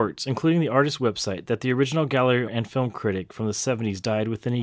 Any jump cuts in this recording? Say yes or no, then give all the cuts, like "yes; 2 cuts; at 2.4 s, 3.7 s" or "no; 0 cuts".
yes; 1 cut; at 2.5 s